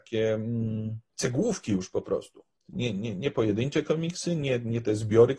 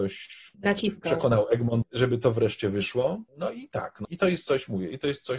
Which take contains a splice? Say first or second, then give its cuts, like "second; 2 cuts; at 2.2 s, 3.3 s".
second; 3 cuts; at 1.8 s, 3.3 s, 4.0 s